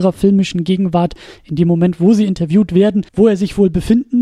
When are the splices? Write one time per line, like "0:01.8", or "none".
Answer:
0:03.1